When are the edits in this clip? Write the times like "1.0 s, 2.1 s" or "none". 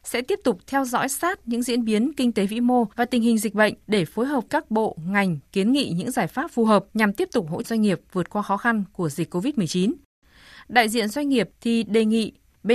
2.9 s, 3.8 s, 4.5 s, 6.9 s, 7.6 s

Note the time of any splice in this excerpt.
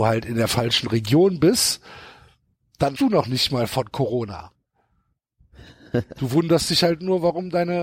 3.0 s

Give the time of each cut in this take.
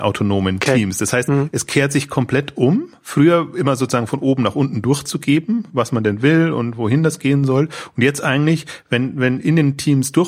none

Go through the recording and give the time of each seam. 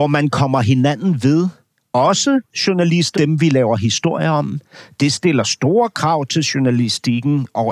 3.1 s

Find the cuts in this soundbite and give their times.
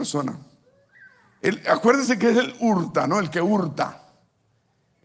none

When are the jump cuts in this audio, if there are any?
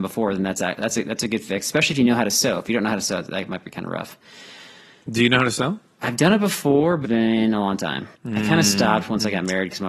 7.0 s, 8.1 s

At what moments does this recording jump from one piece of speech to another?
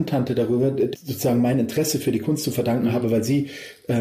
0.9 s

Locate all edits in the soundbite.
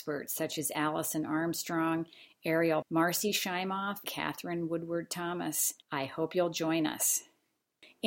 2.8 s, 4.0 s, 5.8 s

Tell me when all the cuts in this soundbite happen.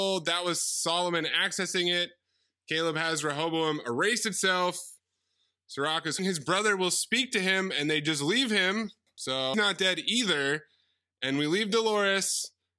6.2 s, 9.5 s

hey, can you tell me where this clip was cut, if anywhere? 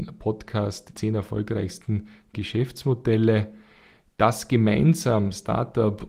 0.9 s, 2.3 s

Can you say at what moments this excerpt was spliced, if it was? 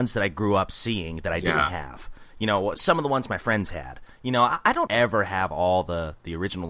2.7 s, 4.1 s, 4.9 s

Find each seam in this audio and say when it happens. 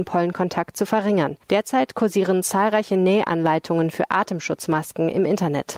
1.4 s

